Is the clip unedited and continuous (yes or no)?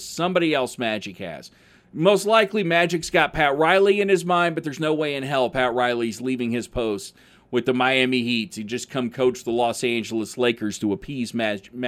yes